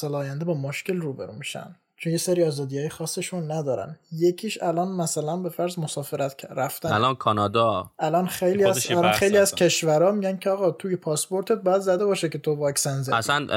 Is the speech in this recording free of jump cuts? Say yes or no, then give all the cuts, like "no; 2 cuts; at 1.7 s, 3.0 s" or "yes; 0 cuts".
yes; 0 cuts